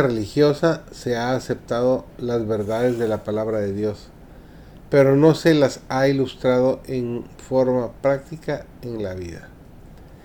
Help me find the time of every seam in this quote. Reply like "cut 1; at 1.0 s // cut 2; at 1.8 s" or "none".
cut 1; at 2.1 s